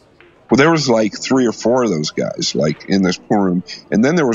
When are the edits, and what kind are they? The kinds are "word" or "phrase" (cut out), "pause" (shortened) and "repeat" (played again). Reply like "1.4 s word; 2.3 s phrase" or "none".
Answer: none